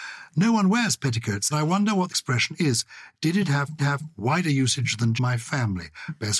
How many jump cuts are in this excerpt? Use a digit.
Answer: 4